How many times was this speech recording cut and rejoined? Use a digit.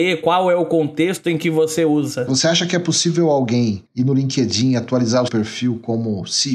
2